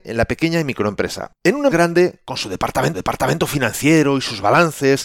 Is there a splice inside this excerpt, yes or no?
yes